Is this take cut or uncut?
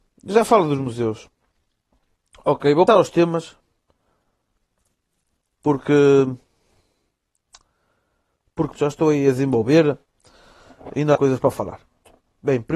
cut